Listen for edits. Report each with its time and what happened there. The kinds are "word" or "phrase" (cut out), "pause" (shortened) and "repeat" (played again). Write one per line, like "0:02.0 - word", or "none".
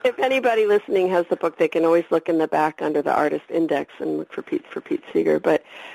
0:04.7 - repeat